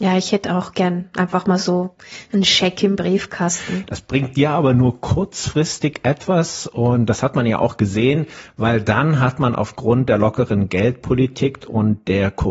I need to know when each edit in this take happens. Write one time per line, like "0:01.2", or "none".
none